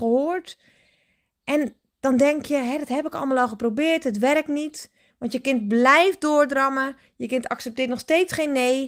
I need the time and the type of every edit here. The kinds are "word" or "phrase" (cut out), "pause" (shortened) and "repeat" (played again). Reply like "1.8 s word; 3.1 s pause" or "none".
none